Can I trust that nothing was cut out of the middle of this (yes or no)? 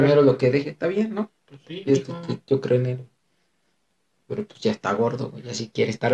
yes